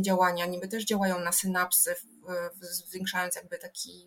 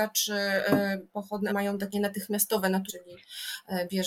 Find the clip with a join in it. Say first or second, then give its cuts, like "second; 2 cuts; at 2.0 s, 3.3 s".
second; 3 cuts; at 1.5 s, 1.9 s, 2.9 s